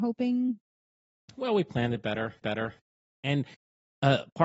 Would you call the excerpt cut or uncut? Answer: cut